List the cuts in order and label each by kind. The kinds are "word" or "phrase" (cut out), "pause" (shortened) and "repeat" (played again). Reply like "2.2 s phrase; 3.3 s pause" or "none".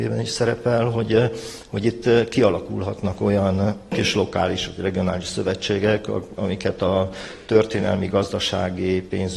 none